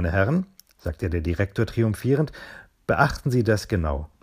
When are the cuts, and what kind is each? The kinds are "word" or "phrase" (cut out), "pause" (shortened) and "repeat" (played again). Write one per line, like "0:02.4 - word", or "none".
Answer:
none